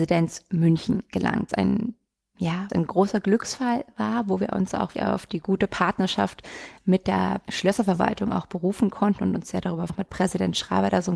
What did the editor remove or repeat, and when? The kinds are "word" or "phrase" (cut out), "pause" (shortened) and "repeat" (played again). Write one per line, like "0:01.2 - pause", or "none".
0:01.5 - word
0:02.7 - word
0:04.9 - word
0:07.5 - word
0:09.9 - word